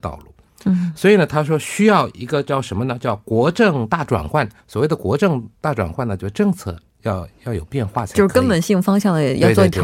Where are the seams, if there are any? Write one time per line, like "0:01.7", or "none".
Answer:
0:04.6